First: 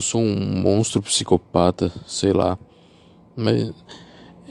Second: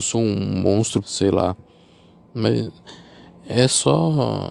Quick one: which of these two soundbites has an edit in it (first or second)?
second